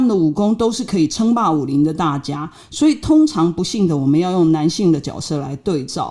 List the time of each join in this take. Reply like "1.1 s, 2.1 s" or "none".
none